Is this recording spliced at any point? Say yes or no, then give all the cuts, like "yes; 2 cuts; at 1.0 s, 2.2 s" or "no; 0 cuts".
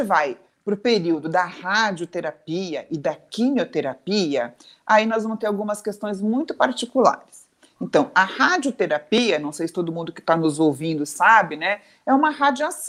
no; 0 cuts